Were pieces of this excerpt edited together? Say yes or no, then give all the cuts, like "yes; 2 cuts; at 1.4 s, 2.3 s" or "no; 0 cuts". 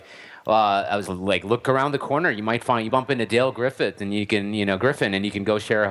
yes; 2 cuts; at 1.1 s, 2.9 s